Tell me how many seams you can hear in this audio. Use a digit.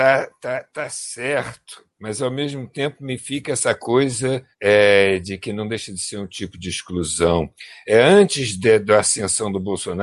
2